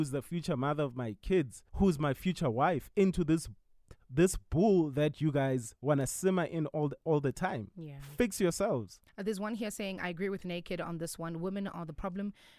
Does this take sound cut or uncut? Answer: cut